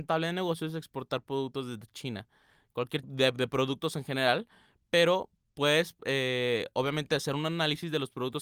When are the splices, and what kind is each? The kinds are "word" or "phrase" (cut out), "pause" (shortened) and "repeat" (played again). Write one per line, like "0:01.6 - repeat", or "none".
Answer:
0:03.0 - word